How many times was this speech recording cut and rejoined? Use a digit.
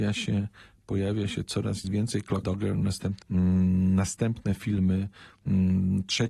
3